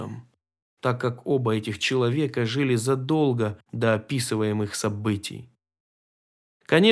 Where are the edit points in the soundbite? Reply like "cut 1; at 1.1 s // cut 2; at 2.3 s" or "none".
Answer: cut 1; at 3.6 s

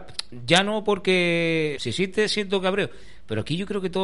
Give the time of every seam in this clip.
cut 1; at 1.8 s

